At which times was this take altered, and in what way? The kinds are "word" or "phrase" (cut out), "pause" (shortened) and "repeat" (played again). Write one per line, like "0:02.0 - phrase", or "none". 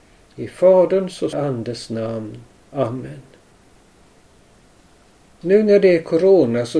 0:01.3 - phrase
0:02.6 - pause